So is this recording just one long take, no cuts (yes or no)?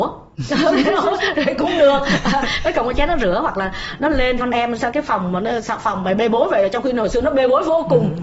no